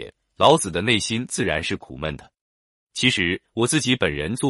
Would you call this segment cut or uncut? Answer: uncut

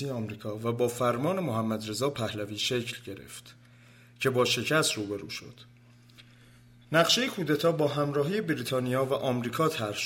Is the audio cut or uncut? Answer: uncut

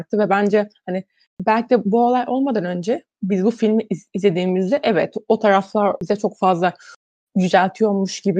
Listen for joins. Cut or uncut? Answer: uncut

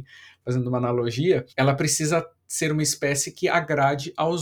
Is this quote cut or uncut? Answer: cut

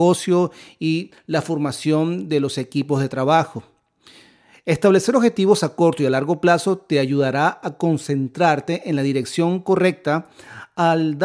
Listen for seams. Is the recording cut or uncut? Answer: uncut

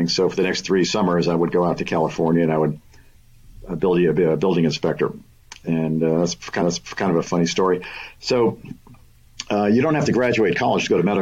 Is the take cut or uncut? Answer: cut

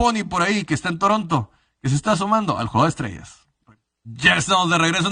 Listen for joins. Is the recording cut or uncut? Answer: uncut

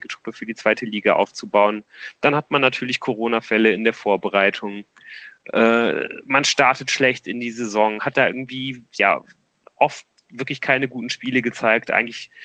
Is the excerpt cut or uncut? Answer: uncut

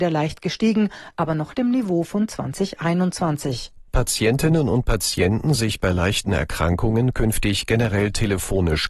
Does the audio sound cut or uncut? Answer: cut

